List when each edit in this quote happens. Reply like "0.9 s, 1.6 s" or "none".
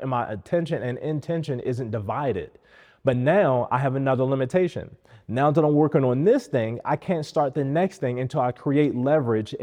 none